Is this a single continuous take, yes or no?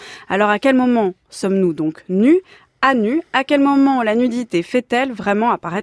yes